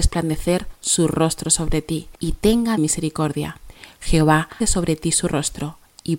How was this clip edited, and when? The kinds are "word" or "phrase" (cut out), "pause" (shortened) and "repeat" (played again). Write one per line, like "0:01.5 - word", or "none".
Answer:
0:02.2 - pause
0:02.8 - phrase
0:04.6 - word